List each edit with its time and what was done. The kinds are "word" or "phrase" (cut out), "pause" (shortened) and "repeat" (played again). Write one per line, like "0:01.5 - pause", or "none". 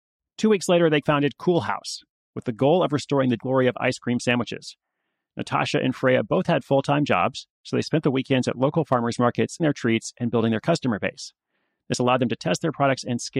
0:01.0 - word
0:03.4 - word
0:09.6 - word